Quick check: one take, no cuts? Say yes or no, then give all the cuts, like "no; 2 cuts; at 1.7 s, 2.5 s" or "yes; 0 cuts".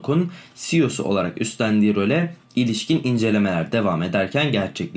yes; 0 cuts